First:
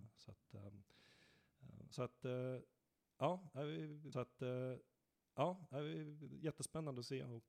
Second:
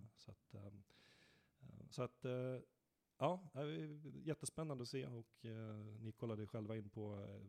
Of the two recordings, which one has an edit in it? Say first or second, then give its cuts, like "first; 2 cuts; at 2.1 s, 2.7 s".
first; 1 cut; at 4.1 s